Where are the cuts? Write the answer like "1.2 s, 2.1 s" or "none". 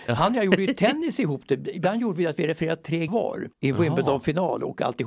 3.1 s, 3.5 s